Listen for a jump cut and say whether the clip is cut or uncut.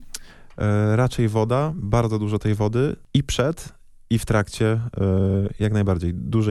uncut